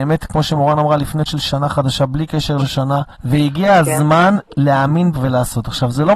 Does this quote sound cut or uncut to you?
cut